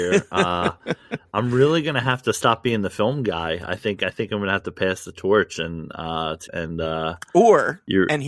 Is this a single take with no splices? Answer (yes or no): no